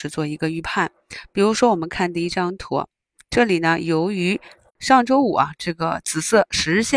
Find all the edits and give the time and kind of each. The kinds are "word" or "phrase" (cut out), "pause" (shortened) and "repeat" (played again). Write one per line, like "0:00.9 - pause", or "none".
none